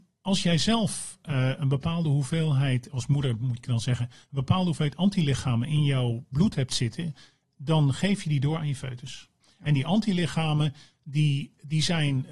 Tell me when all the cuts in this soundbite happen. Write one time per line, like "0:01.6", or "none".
none